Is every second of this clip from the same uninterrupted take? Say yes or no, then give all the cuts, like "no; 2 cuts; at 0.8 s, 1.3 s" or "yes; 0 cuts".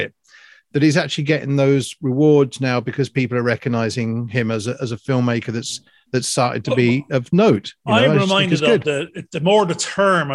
yes; 0 cuts